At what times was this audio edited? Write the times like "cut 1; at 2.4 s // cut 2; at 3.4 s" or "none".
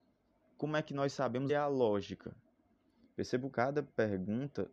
cut 1; at 1.5 s // cut 2; at 3.5 s